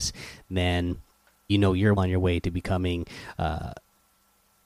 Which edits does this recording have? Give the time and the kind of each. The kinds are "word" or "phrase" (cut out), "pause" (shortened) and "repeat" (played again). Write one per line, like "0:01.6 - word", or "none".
0:01.5 - word
0:02.0 - word

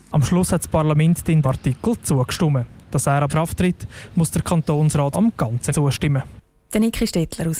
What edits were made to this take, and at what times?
0:01.4 - word
0:03.3 - word
0:05.1 - word
0:05.7 - word

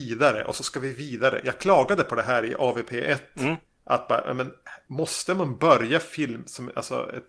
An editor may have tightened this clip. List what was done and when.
none

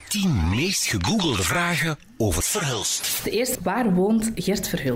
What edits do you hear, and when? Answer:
0:02.4 - word
0:03.5 - phrase

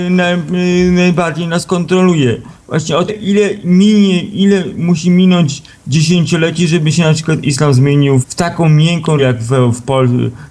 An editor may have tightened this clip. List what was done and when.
0:03.1 - word
0:08.2 - word
0:09.2 - word

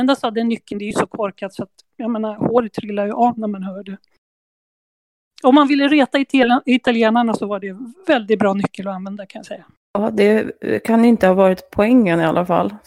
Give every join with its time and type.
none

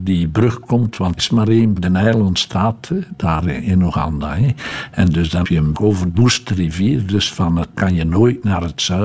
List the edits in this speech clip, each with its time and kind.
0:01.2 - word
0:01.8 - word
0:05.4 - word
0:05.7 - word
0:06.1 - word
0:07.7 - word

